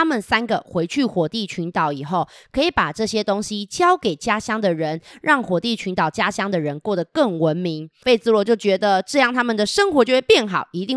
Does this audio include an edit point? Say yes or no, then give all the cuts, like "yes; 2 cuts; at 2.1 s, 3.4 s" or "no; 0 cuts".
no; 0 cuts